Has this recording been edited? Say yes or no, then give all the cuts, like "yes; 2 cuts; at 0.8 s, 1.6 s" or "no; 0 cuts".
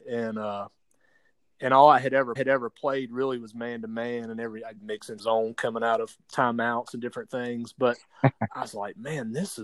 yes; 4 cuts; at 2.4 s, 4.8 s, 5.2 s, 8.5 s